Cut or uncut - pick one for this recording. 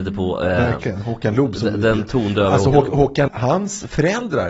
cut